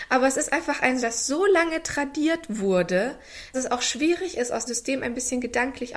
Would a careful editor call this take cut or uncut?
cut